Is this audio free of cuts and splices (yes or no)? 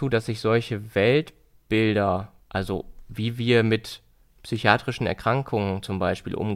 no